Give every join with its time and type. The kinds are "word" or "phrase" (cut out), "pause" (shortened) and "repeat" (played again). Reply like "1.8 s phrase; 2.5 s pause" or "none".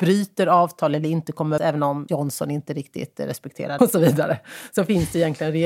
1.6 s word; 2.1 s word; 3.8 s word